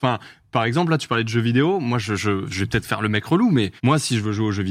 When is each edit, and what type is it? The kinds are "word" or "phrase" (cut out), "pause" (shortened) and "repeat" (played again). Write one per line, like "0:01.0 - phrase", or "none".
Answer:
0:03.8 - pause